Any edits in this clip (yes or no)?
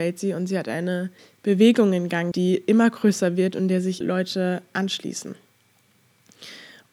yes